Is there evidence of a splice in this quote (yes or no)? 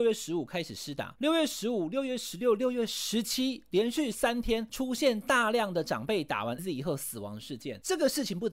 yes